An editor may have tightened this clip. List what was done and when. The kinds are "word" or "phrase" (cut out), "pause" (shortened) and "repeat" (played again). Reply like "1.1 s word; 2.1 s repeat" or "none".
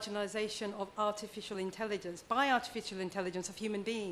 none